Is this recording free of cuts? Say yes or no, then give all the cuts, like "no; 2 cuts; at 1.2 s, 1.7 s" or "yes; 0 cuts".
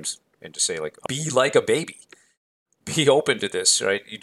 no; 1 cut; at 1.1 s